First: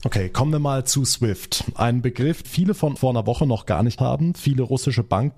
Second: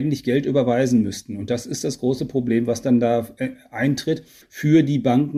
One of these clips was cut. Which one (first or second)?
first